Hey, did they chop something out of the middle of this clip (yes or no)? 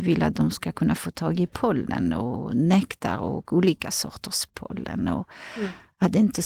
no